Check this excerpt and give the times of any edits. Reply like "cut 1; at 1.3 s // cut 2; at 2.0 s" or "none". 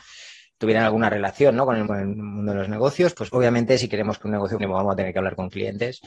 cut 1; at 1.9 s // cut 2; at 3.3 s // cut 3; at 4.6 s